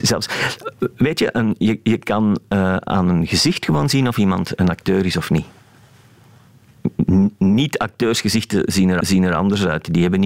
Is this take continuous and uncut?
no; 1 cut; at 9.0 s

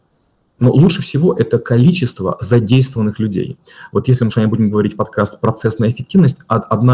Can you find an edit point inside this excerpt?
no; 0 cuts

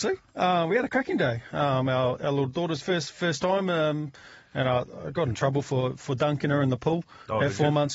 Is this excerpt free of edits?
yes; 0 cuts

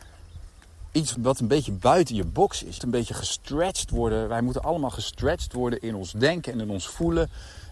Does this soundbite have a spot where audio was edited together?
yes; 2 cuts; at 1.1 s, 2.8 s

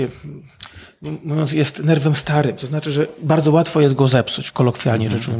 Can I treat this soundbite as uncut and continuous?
yes; 0 cuts

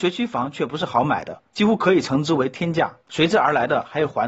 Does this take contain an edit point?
yes; 2 cuts; at 1.5 s, 3.0 s

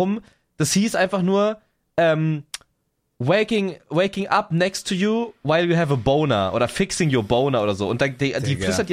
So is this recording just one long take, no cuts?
yes; 0 cuts

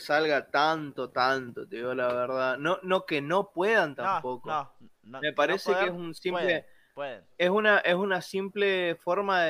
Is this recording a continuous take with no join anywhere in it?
no; 1 cut; at 3.1 s

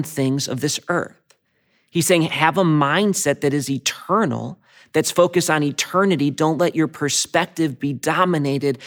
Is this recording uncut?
yes; 0 cuts

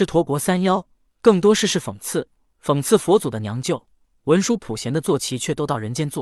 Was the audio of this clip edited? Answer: no; 0 cuts

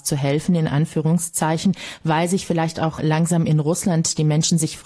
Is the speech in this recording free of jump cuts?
yes; 0 cuts

